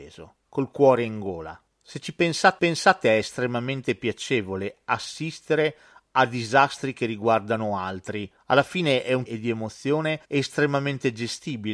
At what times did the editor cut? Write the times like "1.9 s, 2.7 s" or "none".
2.6 s, 9.3 s, 10.2 s